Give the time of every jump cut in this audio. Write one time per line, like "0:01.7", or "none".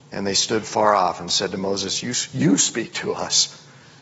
none